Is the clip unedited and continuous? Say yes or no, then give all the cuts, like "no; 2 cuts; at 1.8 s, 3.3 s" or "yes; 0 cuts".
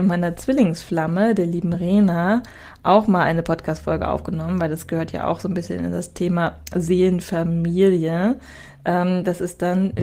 yes; 0 cuts